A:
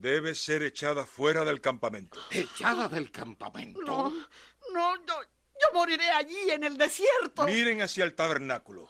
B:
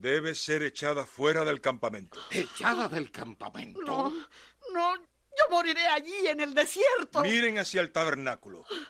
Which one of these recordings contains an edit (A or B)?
B